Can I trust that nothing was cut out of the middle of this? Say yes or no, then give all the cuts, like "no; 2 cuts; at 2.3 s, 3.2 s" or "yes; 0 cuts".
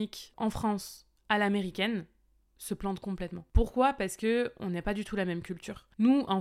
yes; 0 cuts